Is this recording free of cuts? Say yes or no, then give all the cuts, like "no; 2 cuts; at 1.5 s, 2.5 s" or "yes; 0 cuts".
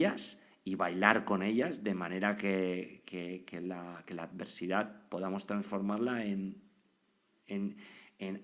yes; 0 cuts